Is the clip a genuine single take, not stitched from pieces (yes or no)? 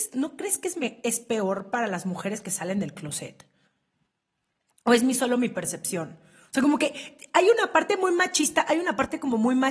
yes